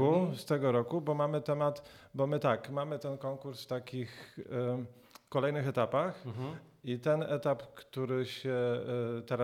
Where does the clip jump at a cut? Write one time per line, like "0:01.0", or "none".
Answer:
none

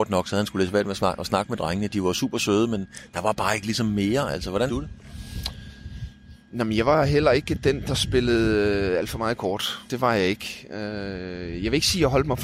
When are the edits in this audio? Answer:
0:04.7
0:09.9

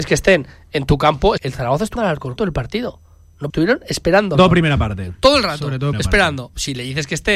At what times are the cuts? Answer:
0:01.4
0:02.0
0:02.4
0:03.5
0:04.3
0:05.9

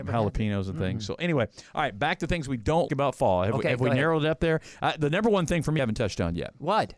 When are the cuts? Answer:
0:02.9
0:05.8

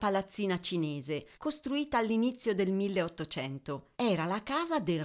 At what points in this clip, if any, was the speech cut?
0:01.3
0:03.9

